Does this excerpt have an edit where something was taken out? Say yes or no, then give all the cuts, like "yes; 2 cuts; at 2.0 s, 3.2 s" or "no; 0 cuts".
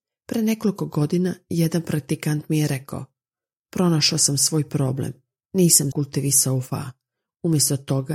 yes; 1 cut; at 5.9 s